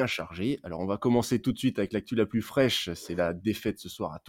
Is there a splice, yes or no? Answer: no